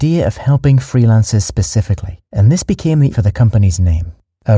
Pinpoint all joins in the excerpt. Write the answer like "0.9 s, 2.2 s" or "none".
2.3 s, 3.1 s